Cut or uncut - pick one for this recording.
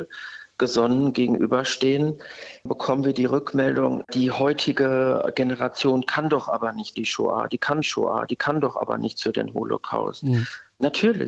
cut